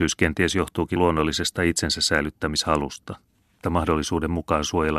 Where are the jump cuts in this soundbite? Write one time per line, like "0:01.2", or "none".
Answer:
0:01.0
0:03.6